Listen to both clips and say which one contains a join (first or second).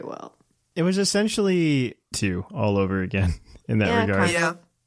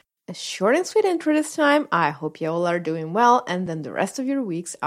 first